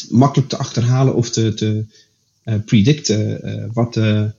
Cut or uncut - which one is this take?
uncut